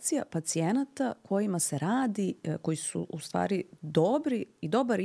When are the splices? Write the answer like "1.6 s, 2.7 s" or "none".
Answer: none

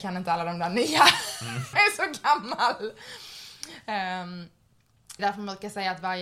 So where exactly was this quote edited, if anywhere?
1.7 s, 5.2 s

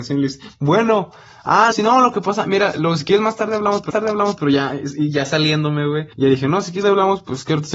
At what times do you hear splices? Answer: 1.7 s, 3.9 s, 6.1 s, 6.8 s

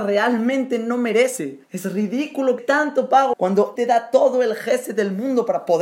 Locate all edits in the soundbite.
1.6 s, 2.6 s, 3.3 s, 3.8 s

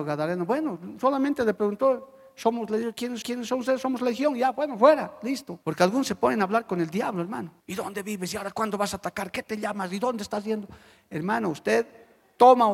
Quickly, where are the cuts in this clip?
3.2 s, 5.6 s, 7.6 s

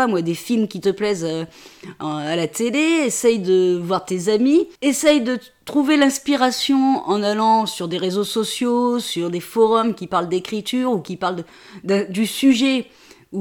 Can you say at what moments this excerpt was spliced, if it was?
4.8 s

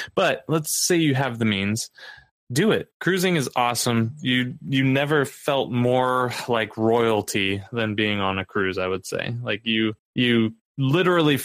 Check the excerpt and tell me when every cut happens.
10.0 s

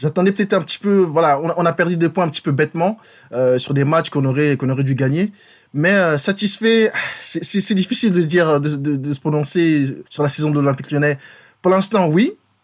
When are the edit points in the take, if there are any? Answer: 10.1 s

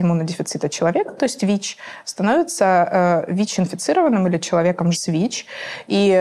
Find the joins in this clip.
4.9 s

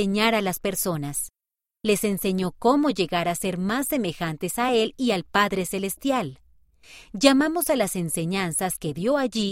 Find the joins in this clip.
none

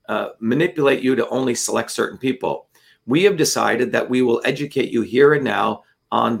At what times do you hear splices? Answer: none

